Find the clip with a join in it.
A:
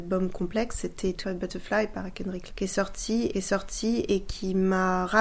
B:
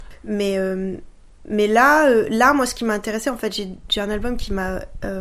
A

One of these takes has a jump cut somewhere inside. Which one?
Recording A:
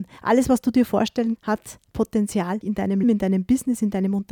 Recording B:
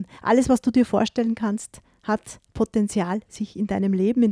A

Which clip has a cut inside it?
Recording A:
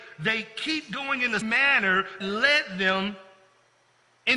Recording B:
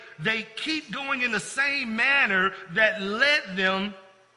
A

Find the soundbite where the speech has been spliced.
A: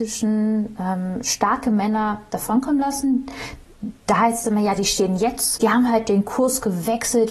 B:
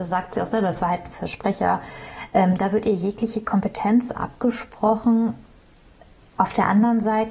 A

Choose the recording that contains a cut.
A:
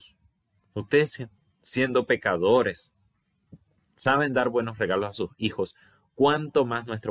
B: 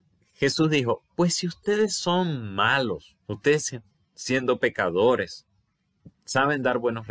B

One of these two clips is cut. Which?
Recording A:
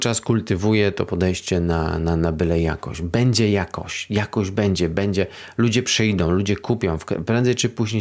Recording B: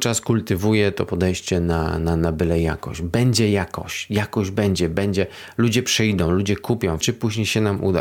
B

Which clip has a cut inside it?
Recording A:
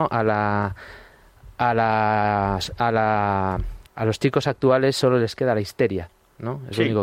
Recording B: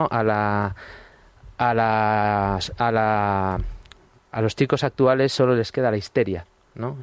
A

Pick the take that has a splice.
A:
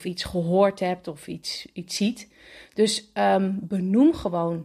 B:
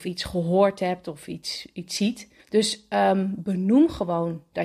B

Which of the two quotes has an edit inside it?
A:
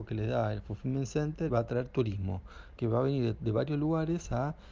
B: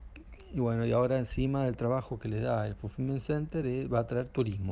A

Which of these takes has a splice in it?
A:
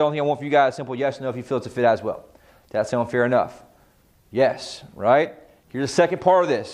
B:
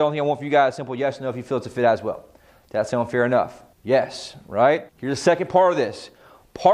B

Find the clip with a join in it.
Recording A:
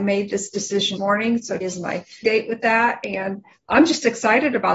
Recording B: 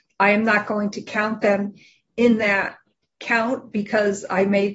A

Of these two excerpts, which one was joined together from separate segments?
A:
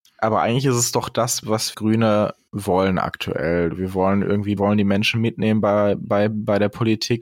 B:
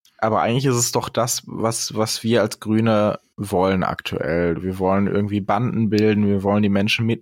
A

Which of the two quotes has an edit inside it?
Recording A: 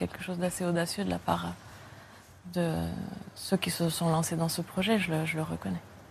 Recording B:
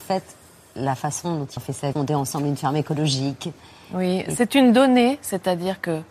B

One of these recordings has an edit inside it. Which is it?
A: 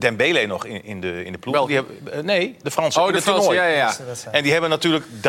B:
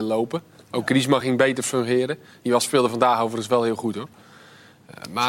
A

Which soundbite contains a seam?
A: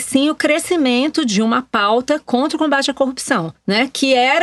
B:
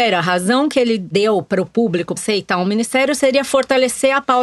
B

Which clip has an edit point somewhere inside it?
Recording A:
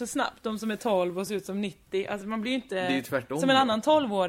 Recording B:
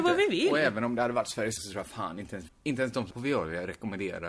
B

